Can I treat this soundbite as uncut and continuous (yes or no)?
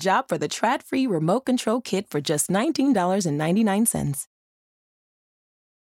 yes